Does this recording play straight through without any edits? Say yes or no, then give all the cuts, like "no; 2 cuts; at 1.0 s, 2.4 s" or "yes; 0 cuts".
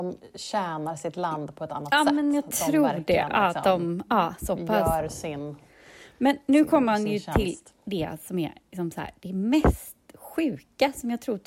yes; 0 cuts